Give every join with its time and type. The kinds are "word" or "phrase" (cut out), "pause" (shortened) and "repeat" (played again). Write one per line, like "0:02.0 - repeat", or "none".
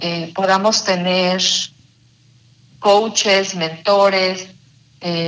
none